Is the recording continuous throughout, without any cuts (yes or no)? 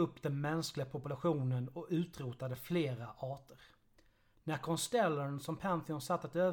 yes